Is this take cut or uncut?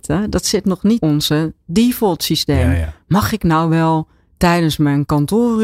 cut